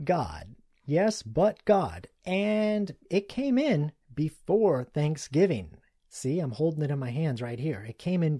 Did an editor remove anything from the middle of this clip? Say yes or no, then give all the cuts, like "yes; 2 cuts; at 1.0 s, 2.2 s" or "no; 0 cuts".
no; 0 cuts